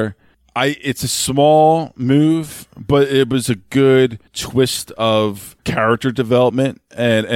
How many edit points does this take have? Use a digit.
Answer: 2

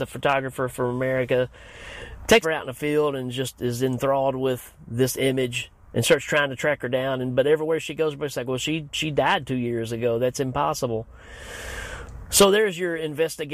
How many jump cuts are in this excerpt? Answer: 1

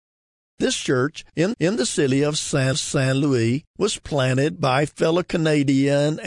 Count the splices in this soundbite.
2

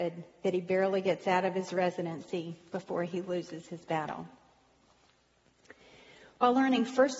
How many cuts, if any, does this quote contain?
0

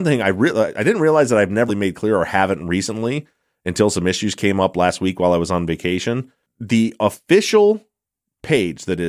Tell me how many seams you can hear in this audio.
1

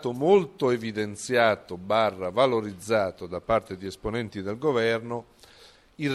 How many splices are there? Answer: 0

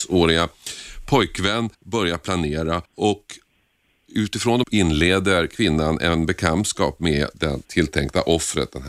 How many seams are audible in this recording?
4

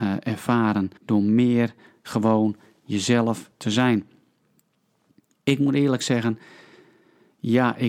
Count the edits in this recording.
1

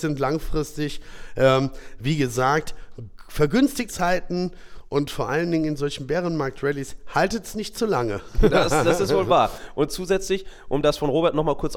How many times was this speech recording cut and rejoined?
1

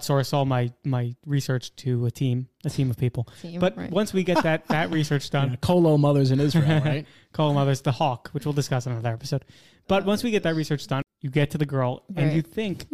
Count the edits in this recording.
0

